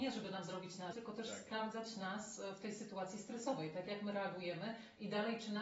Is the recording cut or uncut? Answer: cut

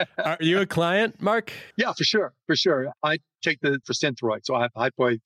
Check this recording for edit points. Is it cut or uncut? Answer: cut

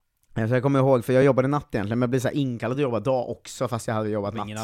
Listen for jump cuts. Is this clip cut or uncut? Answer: uncut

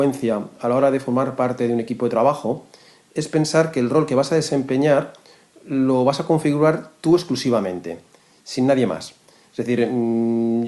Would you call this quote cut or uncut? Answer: uncut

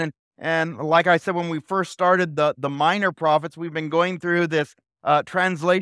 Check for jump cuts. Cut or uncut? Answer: uncut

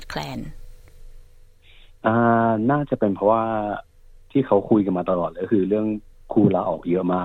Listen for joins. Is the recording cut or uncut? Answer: cut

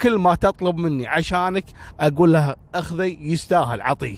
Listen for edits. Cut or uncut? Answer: uncut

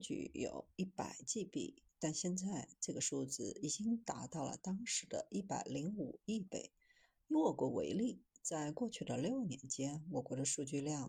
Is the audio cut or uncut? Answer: uncut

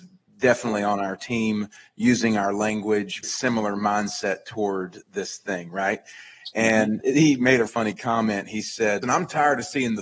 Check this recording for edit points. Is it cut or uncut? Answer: cut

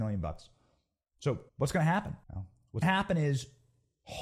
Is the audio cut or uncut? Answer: cut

